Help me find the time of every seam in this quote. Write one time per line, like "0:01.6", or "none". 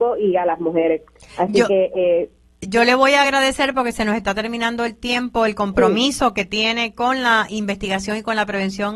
none